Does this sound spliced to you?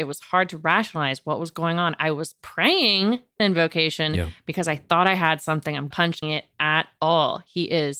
yes; 3 cuts; at 3.4 s, 5.9 s, 6.2 s

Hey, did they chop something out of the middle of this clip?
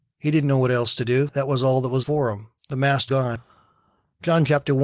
yes; 3 cuts; at 2.0 s, 2.6 s, 3.1 s

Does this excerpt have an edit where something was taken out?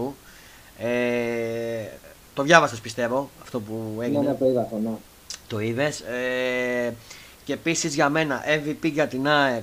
no; 0 cuts

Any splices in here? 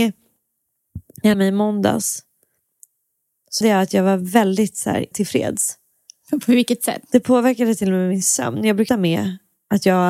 yes; 4 cuts; at 1.3 s, 3.6 s, 5.1 s, 8.9 s

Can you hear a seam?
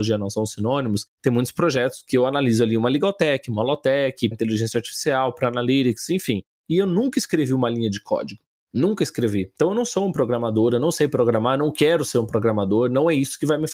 yes; 1 cut; at 4.3 s

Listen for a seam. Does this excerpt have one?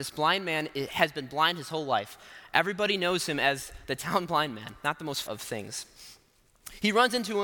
yes; 1 cut; at 5.2 s

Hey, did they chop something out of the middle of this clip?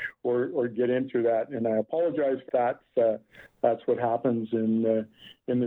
yes; 1 cut; at 2.5 s

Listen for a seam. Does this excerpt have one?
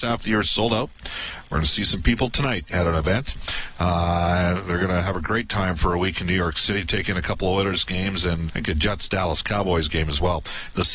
yes; 1 cut; at 8.5 s

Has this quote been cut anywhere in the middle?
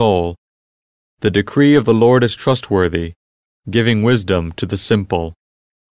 no; 0 cuts

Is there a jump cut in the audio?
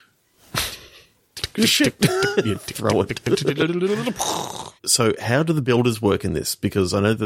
yes; 1 cut; at 4.8 s

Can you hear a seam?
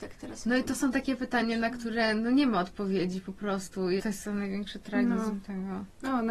yes; 1 cut; at 4.0 s

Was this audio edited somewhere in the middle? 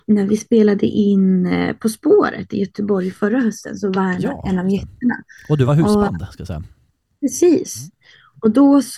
no; 0 cuts

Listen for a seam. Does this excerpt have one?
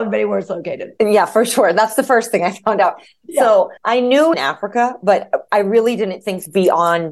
yes; 2 cuts; at 3.8 s, 4.3 s

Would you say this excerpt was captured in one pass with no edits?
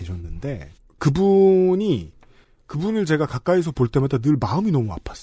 yes; 0 cuts

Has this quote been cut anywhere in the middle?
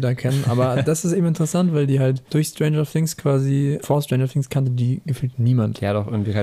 yes; 2 cuts; at 2.3 s, 3.8 s

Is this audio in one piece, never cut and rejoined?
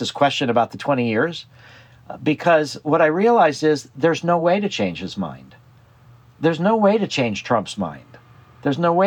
yes; 0 cuts

